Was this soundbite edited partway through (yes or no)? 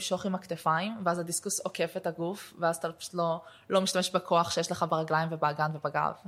no